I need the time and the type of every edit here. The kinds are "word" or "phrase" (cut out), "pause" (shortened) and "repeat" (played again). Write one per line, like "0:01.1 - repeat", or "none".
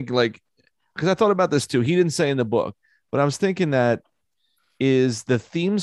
none